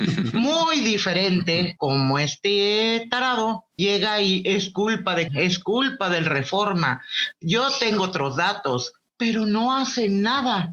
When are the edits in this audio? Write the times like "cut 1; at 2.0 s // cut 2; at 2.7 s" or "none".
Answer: cut 1; at 1.8 s // cut 2; at 3.8 s // cut 3; at 5.3 s